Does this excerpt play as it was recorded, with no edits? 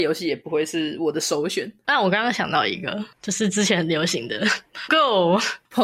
no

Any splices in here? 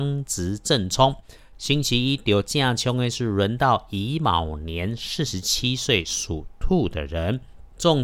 no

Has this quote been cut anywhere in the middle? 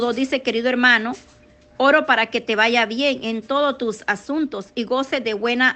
no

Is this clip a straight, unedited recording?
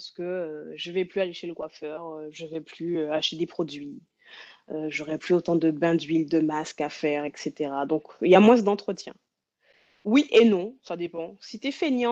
yes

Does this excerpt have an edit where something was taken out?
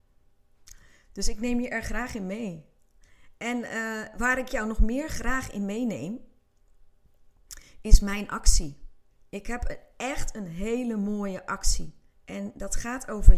yes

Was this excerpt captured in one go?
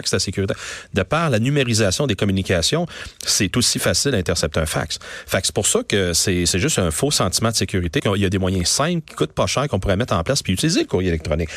no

